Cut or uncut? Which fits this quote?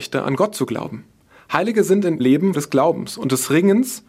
cut